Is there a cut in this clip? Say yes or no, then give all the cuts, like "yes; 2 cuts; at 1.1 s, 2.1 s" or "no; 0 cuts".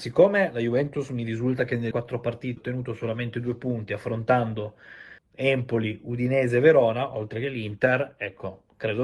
yes; 3 cuts; at 1.9 s, 2.6 s, 5.2 s